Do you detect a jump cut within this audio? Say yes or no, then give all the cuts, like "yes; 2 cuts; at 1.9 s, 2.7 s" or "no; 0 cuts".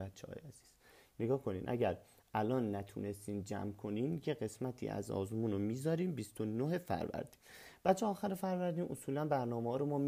no; 0 cuts